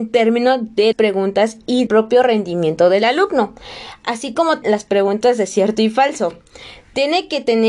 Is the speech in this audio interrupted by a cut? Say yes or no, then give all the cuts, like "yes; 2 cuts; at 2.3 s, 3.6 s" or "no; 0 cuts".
yes; 3 cuts; at 0.9 s, 1.9 s, 4.6 s